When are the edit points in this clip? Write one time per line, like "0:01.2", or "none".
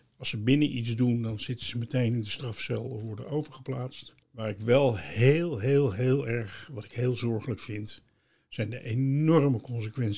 0:04.2